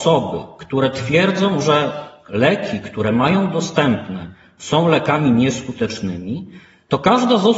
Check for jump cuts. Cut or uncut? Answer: uncut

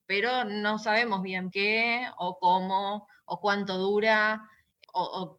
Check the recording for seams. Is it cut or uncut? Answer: cut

